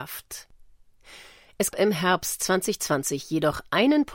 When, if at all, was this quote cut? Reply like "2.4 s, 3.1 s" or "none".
1.7 s

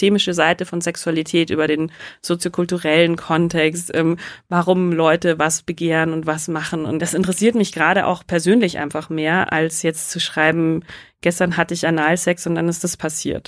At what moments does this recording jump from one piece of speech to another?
none

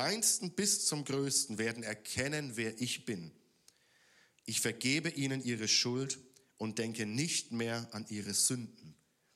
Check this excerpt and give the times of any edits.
none

